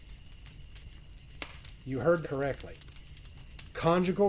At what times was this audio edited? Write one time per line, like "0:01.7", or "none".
0:02.2